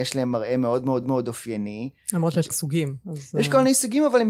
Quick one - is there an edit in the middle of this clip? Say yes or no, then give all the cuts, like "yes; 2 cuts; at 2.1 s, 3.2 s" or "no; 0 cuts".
yes; 2 cuts; at 1.0 s, 2.5 s